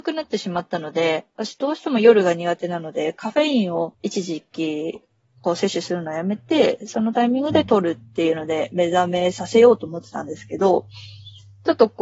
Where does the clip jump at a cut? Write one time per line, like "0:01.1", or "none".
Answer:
0:03.9